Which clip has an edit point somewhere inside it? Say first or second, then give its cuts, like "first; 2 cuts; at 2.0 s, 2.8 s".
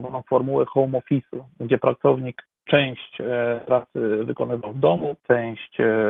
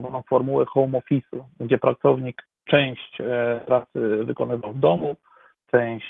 first; 1 cut; at 5.2 s